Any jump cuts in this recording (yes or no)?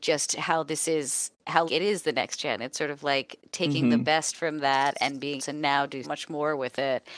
yes